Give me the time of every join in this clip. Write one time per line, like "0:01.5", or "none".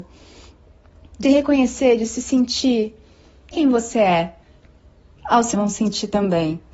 0:01.2
0:03.5
0:05.2
0:05.5